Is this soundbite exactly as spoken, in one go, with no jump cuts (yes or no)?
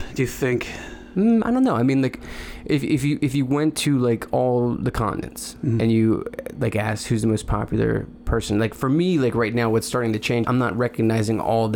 no